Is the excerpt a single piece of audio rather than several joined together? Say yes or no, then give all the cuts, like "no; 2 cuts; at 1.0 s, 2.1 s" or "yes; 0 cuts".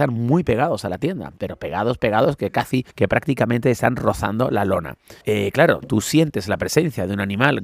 no; 2 cuts; at 2.9 s, 5.2 s